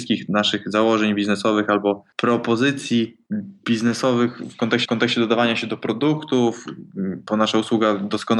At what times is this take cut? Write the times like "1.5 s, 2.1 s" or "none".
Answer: 2.1 s, 4.9 s

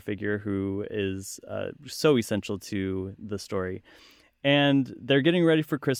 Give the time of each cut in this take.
none

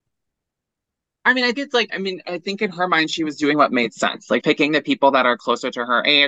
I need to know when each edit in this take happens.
1.5 s, 1.9 s, 4.4 s

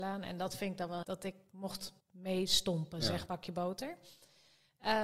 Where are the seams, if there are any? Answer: 1.0 s, 2.0 s, 3.3 s

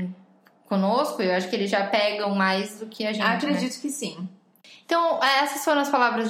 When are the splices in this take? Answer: none

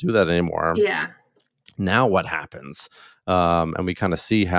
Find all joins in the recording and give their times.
none

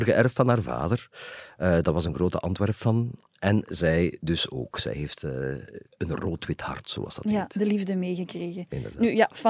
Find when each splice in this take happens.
5.9 s

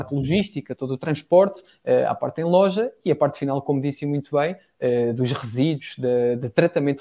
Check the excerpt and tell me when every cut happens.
none

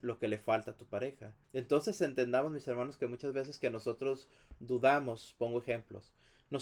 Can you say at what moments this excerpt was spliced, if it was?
1.4 s

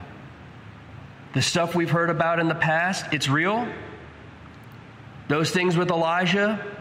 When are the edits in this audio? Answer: none

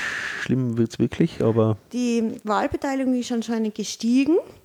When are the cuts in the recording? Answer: none

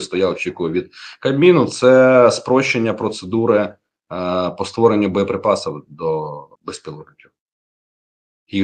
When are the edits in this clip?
6.6 s

